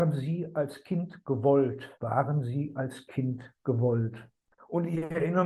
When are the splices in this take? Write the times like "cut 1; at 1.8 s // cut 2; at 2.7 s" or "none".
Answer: cut 1; at 1.9 s